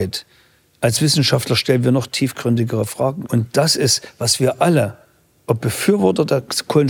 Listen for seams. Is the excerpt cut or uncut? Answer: uncut